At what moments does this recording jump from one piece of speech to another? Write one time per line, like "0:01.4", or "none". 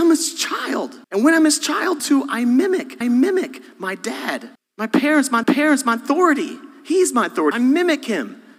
0:01.0
0:02.0
0:03.0
0:04.6
0:05.4
0:07.5